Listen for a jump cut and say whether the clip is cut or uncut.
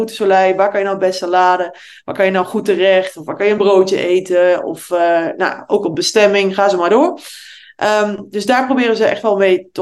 uncut